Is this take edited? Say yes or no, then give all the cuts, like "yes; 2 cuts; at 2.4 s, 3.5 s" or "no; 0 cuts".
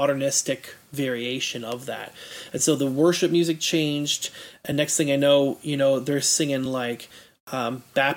no; 0 cuts